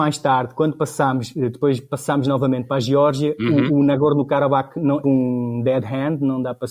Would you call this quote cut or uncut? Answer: cut